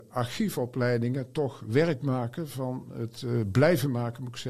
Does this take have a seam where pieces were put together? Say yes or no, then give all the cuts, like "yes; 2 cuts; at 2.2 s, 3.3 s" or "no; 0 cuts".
no; 0 cuts